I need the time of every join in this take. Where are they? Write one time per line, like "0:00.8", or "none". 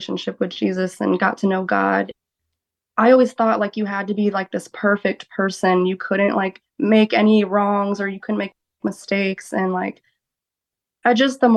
0:06.7